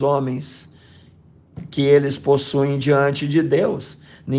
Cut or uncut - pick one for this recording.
uncut